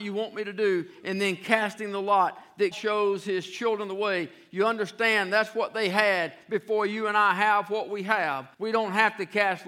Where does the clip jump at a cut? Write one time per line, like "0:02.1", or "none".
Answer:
0:02.7
0:08.5